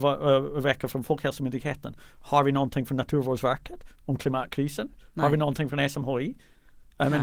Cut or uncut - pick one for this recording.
uncut